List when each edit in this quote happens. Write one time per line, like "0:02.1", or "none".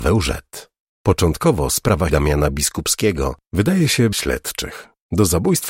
0:02.1
0:04.1